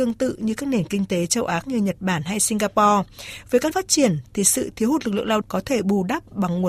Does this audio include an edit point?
yes; 3 cuts; at 1.6 s, 3.7 s, 5.4 s

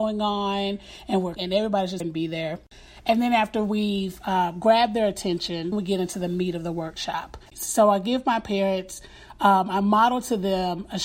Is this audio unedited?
no; 4 cuts; at 1.4 s, 2.0 s, 5.7 s, 7.5 s

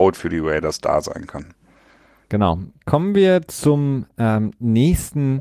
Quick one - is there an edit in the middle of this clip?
no; 0 cuts

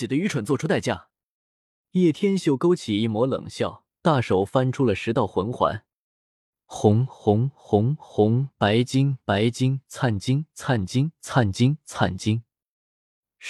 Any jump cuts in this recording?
yes; 1 cut; at 3.9 s

